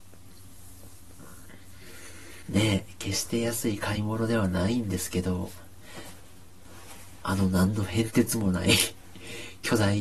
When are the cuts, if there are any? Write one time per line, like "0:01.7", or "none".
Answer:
0:02.4

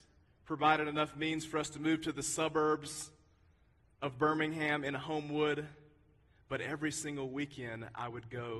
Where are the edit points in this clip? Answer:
none

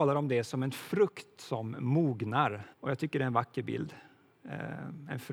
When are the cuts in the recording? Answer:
0:02.7

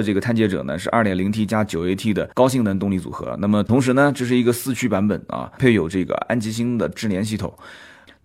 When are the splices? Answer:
0:02.3

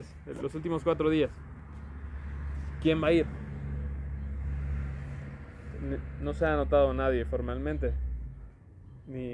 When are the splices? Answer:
0:06.2

